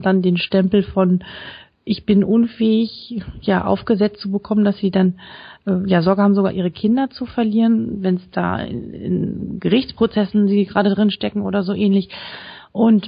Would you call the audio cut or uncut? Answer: uncut